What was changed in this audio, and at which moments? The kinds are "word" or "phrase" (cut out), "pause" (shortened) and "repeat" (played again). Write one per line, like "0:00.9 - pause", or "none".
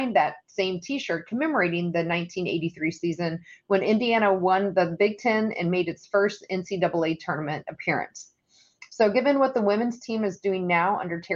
none